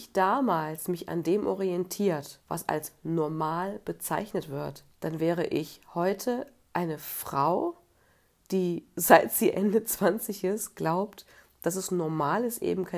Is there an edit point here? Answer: yes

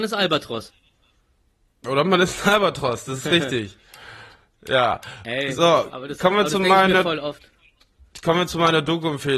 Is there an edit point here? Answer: no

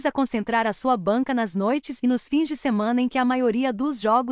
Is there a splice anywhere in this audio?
no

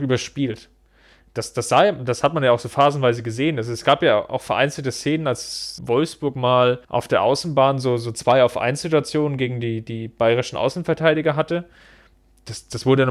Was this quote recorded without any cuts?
no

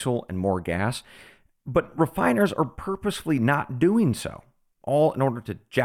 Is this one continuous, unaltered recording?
yes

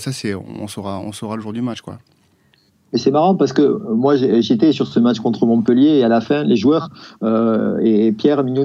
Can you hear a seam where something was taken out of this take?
no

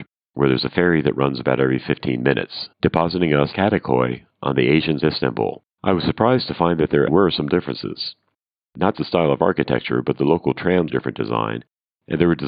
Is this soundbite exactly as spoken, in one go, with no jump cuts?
no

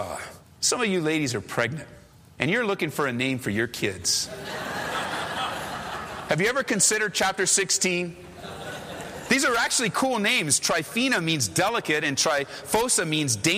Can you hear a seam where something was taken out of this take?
no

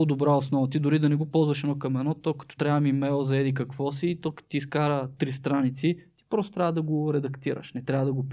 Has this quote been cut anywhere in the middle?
yes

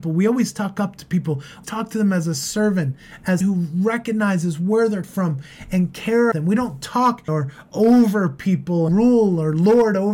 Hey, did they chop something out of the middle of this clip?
yes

